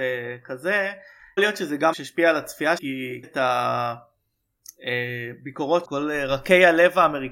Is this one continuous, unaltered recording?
no; 5 cuts; at 1.4 s, 1.9 s, 2.8 s, 3.2 s, 5.8 s

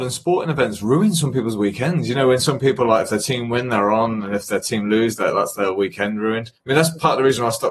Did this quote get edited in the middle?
no; 0 cuts

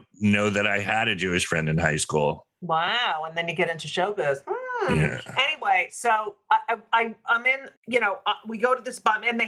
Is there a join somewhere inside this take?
yes; 1 cut; at 7.8 s

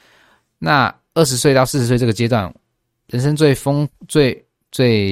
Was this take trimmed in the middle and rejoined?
no; 0 cuts

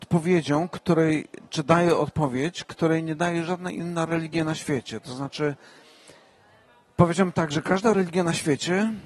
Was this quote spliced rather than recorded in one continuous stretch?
no; 0 cuts

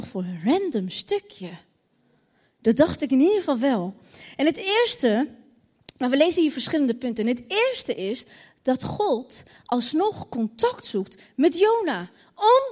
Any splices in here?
no; 0 cuts

